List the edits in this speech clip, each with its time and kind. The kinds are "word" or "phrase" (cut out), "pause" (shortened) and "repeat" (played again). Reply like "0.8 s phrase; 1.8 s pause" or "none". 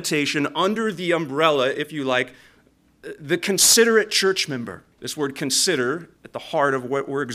4.9 s pause; 6.2 s pause